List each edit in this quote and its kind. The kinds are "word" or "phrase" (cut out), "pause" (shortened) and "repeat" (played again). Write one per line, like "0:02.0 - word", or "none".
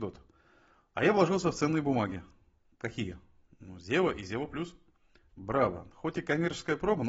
none